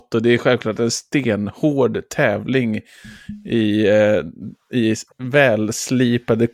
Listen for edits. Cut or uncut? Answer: cut